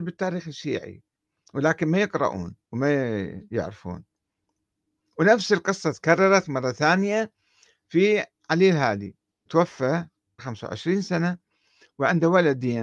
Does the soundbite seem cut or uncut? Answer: cut